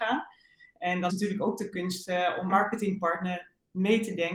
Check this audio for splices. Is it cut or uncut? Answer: cut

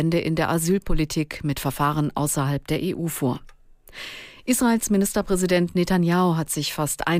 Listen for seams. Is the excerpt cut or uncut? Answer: uncut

